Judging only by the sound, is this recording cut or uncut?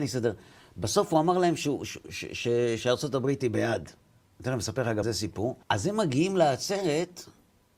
cut